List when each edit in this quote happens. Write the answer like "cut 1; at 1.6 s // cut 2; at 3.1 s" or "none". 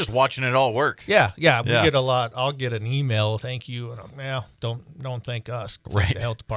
cut 1; at 3.4 s // cut 2; at 4.1 s // cut 3; at 4.5 s

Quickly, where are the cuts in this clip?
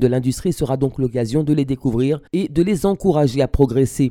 cut 1; at 2.3 s

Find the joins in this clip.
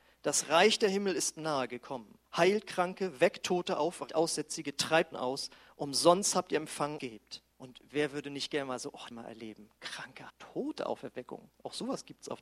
cut 1; at 2.3 s // cut 2; at 4.1 s // cut 3; at 5.1 s // cut 4; at 7.0 s // cut 5; at 7.5 s // cut 6; at 9.1 s // cut 7; at 10.3 s

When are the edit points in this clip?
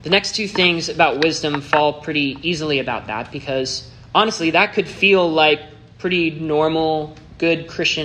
none

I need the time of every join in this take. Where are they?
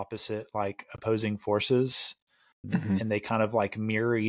cut 1; at 2.6 s

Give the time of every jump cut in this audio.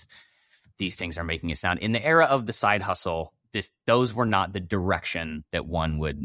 none

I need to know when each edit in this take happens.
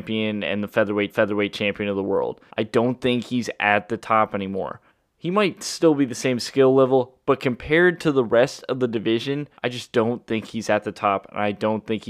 cut 1; at 1.1 s // cut 2; at 2.5 s // cut 3; at 4.9 s // cut 4; at 9.6 s

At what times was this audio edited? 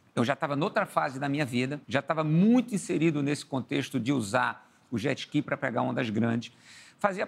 cut 1; at 1.8 s

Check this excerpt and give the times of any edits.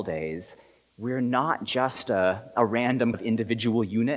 cut 1; at 3.1 s

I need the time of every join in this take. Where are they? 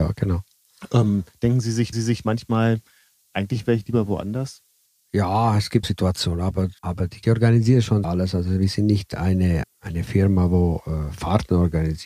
cut 1; at 1.9 s // cut 2; at 4.9 s // cut 3; at 5.8 s // cut 4; at 6.8 s // cut 5; at 7.2 s // cut 6; at 8.0 s // cut 7; at 9.6 s

